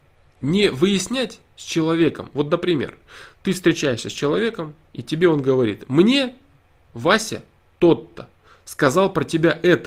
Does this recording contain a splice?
no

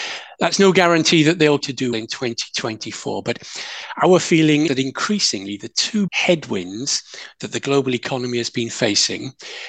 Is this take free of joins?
no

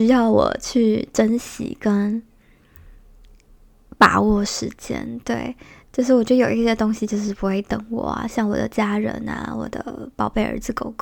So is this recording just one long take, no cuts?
yes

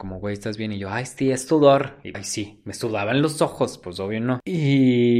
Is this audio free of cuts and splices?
no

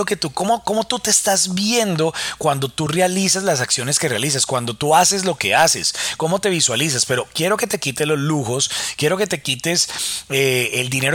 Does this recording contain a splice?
no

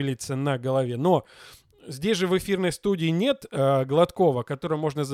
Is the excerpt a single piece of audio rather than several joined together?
yes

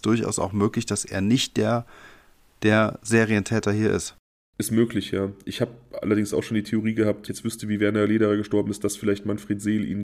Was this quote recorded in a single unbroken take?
no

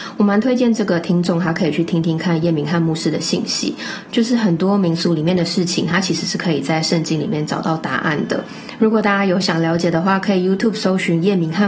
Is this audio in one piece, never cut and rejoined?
yes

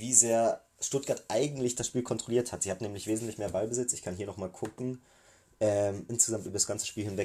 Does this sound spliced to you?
no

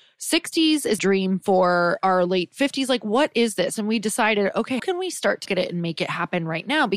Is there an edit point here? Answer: yes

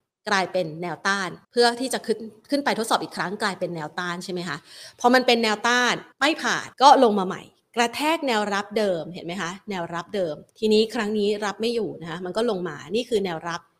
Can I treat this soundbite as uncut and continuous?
no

